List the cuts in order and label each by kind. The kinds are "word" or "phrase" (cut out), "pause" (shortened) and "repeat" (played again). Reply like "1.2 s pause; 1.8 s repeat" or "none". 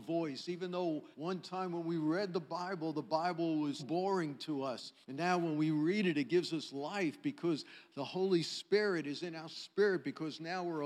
1.1 s pause; 3.8 s word; 5.0 s pause